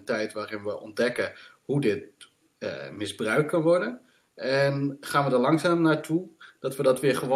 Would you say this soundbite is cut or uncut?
uncut